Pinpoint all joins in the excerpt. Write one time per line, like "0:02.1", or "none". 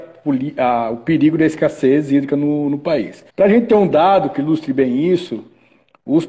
0:03.3